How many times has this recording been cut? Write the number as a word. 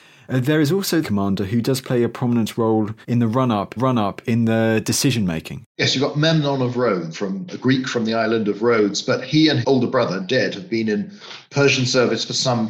six